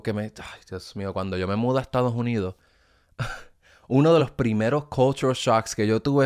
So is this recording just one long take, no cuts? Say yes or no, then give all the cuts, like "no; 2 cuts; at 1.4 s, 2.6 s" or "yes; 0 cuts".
yes; 0 cuts